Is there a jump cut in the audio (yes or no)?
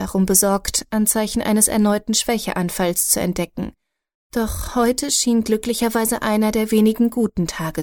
no